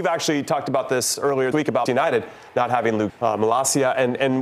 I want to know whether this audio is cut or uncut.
cut